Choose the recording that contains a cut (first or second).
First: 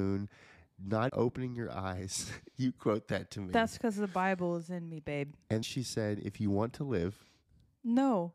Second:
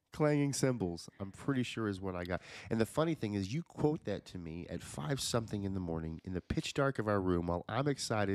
first